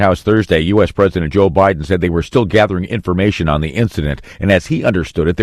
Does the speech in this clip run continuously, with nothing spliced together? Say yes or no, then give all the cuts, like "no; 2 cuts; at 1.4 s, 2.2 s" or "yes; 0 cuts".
yes; 0 cuts